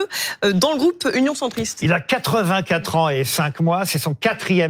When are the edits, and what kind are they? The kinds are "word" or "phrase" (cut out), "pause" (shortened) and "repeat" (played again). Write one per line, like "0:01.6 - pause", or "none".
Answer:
none

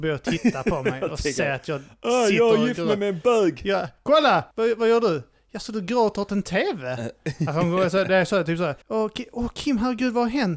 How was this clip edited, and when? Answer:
0:04.5 - pause
0:08.8 - pause

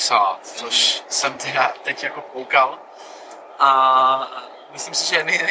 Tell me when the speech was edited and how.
none

